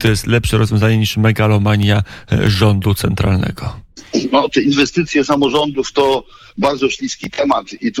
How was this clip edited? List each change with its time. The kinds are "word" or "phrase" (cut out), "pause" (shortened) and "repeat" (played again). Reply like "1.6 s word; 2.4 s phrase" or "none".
none